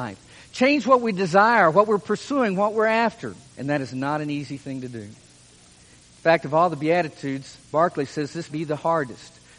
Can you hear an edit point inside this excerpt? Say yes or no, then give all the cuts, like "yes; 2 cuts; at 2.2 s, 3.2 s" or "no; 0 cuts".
yes; 3 cuts; at 3.4 s, 7.6 s, 8.5 s